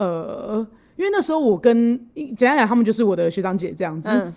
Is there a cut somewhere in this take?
no; 0 cuts

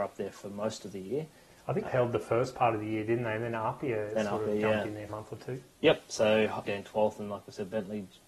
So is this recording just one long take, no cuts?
no; 3 cuts; at 1.9 s, 5.1 s, 6.7 s

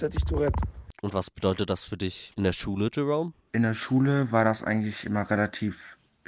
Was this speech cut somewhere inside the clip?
no; 0 cuts

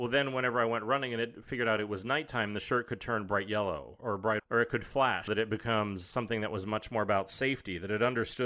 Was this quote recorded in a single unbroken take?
no; 2 cuts; at 4.4 s, 5.3 s

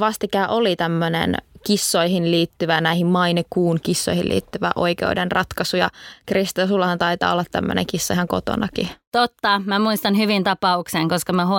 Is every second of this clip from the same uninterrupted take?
no; 1 cut; at 10.4 s

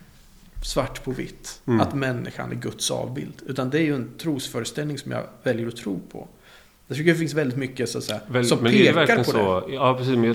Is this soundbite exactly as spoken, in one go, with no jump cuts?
yes; 0 cuts

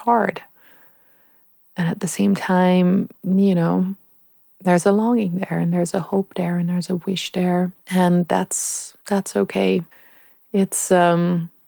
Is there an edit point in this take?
yes; 4 cuts; at 3.1 s, 4.4 s, 7.8 s, 9.0 s

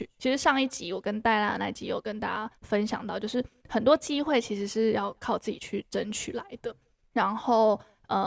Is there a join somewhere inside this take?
yes; 2 cuts; at 2.5 s, 7.1 s

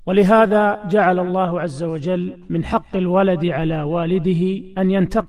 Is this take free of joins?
yes; 0 cuts

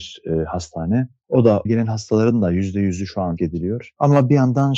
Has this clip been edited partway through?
yes; 2 cuts; at 1.7 s, 3.4 s

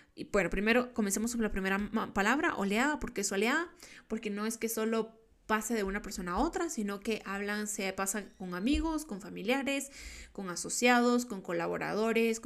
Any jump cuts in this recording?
no; 0 cuts

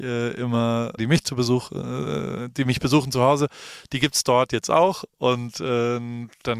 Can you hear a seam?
yes; 1 cut; at 1.0 s

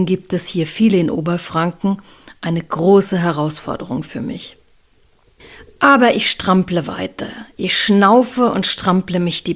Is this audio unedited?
yes; 0 cuts

